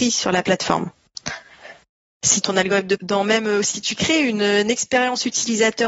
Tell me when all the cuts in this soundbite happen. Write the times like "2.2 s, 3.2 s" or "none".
2.4 s, 3.0 s